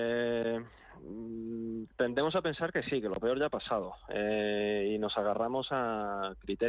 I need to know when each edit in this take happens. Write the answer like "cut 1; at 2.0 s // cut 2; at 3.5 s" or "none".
none